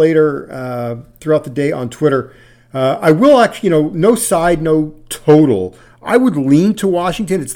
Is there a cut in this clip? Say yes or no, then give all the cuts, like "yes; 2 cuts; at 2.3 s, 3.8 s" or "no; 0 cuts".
no; 0 cuts